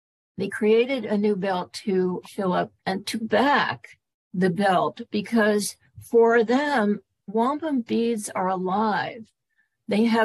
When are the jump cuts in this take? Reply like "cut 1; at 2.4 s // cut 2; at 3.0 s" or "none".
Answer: cut 1; at 2.2 s // cut 2; at 2.8 s // cut 3; at 3.2 s // cut 4; at 4.1 s // cut 5; at 7.3 s